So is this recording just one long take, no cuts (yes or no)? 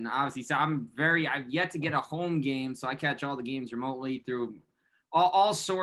yes